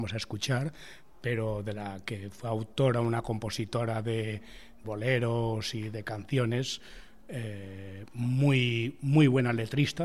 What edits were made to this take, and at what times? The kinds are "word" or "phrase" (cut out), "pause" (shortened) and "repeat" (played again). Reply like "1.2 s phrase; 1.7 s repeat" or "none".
4.8 s phrase